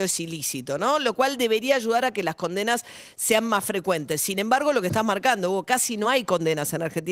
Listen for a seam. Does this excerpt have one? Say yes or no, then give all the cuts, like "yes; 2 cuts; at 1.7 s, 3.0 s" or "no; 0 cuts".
no; 0 cuts